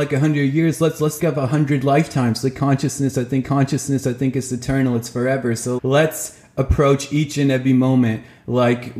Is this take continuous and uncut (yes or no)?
no